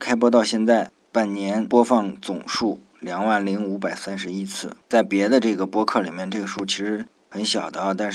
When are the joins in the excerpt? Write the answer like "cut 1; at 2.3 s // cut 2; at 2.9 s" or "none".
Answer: cut 1; at 4.8 s